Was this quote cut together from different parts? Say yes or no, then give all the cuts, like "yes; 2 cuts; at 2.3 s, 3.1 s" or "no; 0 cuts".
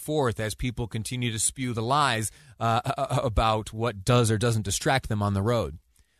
no; 0 cuts